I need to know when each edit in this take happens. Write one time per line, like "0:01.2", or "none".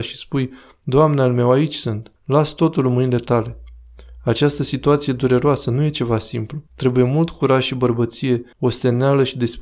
0:02.2
0:06.7
0:08.5